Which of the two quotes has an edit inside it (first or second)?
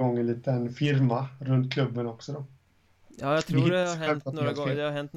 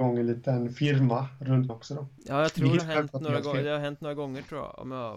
second